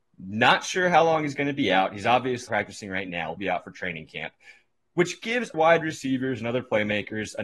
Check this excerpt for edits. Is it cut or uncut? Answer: cut